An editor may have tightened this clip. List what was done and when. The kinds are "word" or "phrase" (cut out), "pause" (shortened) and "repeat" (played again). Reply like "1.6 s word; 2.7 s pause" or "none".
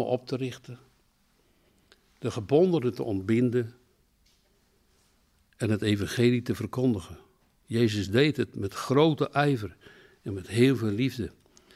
none